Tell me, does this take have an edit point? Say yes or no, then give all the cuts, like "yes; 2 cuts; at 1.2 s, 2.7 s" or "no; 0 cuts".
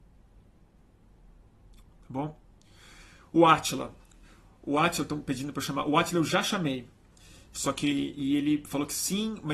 no; 0 cuts